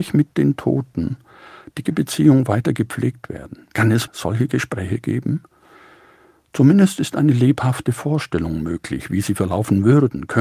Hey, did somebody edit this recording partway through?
yes; 3 cuts; at 1.9 s, 3.7 s, 4.1 s

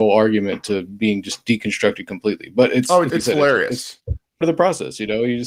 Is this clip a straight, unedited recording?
no; 2 cuts; at 3.1 s, 4.4 s

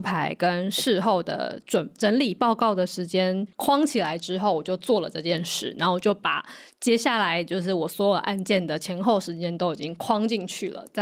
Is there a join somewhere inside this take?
yes; 1 cut; at 3.5 s

